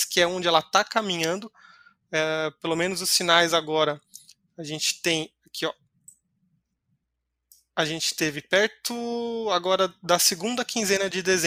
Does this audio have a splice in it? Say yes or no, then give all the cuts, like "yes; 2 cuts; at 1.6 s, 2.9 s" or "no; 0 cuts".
no; 0 cuts